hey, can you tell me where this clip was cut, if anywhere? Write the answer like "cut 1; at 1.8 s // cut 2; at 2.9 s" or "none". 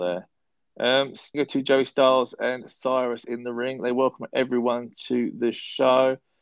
cut 1; at 1.3 s